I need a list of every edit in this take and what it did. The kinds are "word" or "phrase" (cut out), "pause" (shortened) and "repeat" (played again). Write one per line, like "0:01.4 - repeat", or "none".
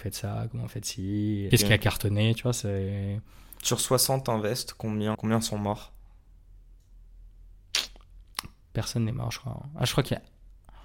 0:01.5 - word
0:05.1 - word